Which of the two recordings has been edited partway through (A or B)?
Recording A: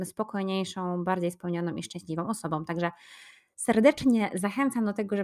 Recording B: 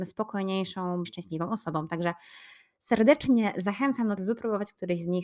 B